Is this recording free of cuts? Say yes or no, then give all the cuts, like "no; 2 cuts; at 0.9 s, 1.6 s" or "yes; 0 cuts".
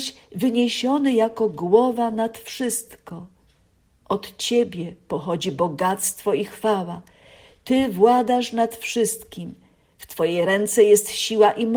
yes; 0 cuts